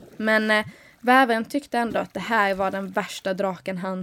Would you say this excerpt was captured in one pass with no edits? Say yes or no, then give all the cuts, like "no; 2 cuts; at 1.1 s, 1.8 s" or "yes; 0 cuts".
yes; 0 cuts